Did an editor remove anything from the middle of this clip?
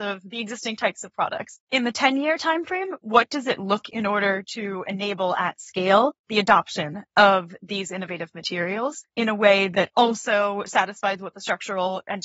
yes; 4 cuts; at 1.6 s, 3.8 s, 6.2 s, 9.1 s

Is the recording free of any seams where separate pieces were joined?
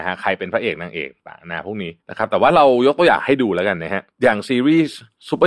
no; 1 cut; at 2.0 s

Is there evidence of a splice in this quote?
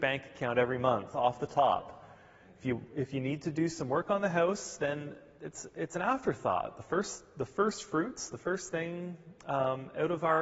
no; 0 cuts

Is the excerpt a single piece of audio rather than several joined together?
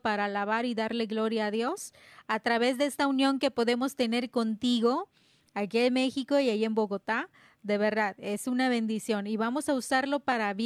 yes; 0 cuts

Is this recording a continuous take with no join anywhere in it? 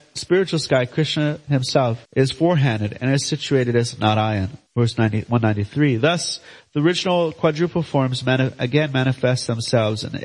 no; 2 cuts; at 2.1 s, 4.7 s

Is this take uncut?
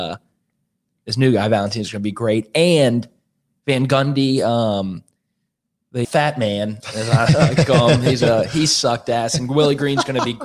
no; 1 cut; at 6.0 s

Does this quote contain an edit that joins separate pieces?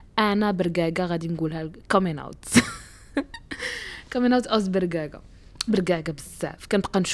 yes; 1 cut; at 5.7 s

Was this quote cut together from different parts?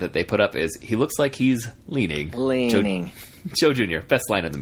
yes; 1 cut; at 1.8 s

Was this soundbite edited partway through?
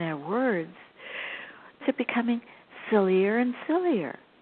yes; 1 cut; at 1.8 s

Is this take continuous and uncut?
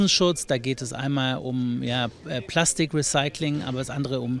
yes; 0 cuts

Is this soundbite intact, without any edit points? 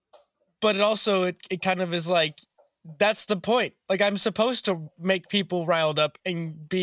yes; 0 cuts

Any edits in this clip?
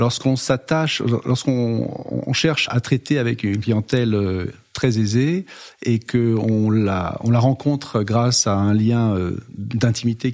yes; 1 cut; at 2.7 s

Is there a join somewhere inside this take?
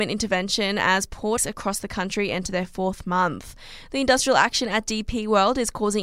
yes; 1 cut; at 1.4 s

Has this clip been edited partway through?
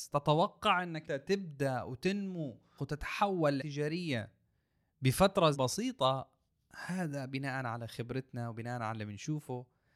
yes; 4 cuts; at 1.1 s, 2.8 s, 3.6 s, 5.5 s

